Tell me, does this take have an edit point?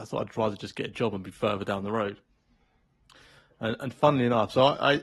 no; 0 cuts

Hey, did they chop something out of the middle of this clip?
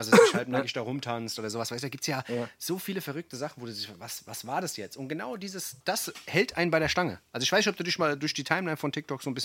yes; 1 cut; at 5.8 s

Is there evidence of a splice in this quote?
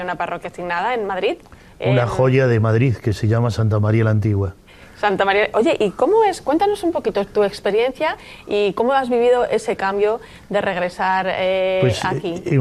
no; 0 cuts

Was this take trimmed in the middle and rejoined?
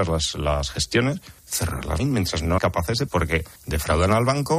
yes; 5 cuts; at 1.4 s, 2.0 s, 2.6 s, 3.1 s, 3.6 s

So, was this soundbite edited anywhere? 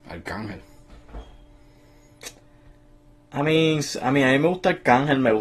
no; 0 cuts

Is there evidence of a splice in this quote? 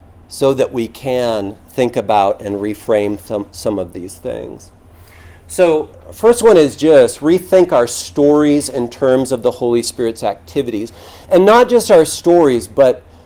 yes; 1 cut; at 5.9 s

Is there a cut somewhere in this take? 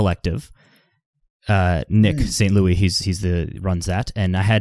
no; 0 cuts

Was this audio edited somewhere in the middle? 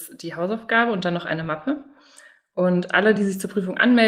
no; 0 cuts

